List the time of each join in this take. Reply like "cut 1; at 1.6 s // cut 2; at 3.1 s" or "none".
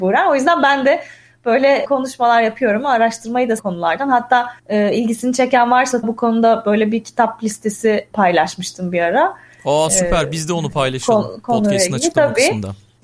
cut 1; at 3.6 s // cut 2; at 4.6 s // cut 3; at 6.0 s